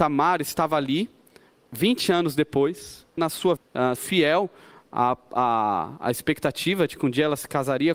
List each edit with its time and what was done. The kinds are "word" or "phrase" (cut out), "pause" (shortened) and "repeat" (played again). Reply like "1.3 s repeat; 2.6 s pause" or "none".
3.2 s word; 3.6 s word; 4.0 s word